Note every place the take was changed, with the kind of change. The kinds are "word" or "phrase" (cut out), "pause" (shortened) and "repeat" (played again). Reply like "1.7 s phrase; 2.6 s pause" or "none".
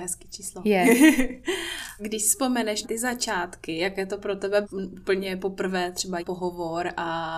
2.0 s word; 2.8 s word; 4.6 s word; 6.2 s phrase